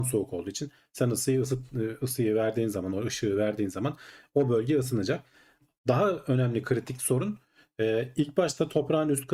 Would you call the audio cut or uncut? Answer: uncut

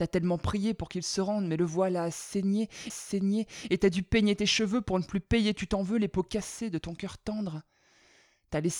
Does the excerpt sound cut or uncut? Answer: cut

